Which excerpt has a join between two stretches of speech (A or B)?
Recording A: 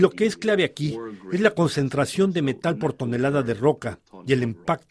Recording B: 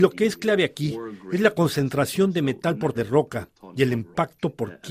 B